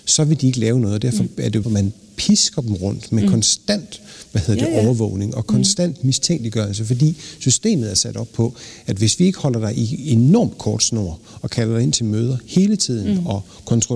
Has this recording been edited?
yes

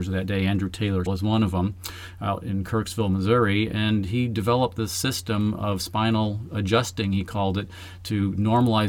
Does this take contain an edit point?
yes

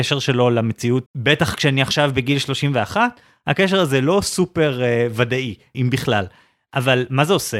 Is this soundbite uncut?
no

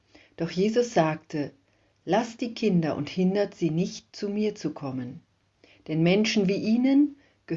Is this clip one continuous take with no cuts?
yes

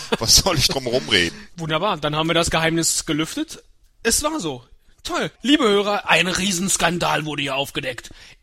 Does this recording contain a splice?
no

